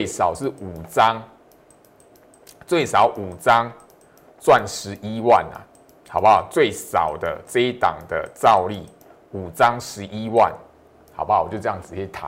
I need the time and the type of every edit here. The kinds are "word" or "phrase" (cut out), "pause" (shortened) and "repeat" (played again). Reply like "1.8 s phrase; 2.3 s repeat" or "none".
none